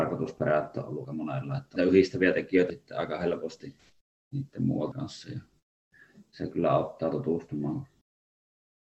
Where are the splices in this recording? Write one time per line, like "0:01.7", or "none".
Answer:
0:01.0
0:01.8
0:02.7
0:04.9